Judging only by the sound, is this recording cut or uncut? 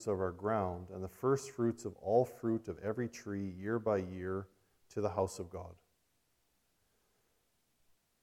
uncut